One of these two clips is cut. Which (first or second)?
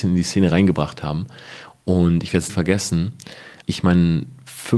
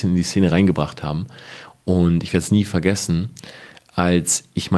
first